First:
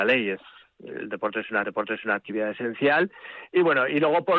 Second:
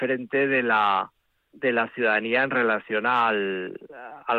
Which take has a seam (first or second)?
first